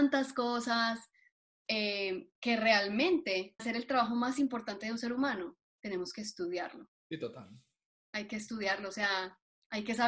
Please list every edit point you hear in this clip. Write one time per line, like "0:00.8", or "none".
0:03.6